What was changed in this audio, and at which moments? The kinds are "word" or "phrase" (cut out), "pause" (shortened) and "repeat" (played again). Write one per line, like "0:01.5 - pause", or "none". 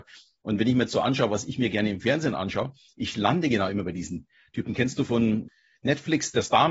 none